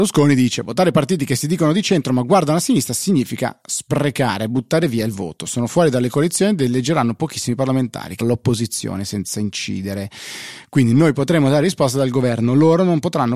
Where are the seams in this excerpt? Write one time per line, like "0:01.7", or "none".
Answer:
0:08.2